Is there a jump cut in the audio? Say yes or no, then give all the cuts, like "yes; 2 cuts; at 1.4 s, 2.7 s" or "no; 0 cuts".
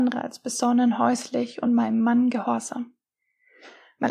no; 0 cuts